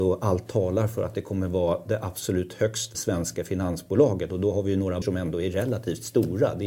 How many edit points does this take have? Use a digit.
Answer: 2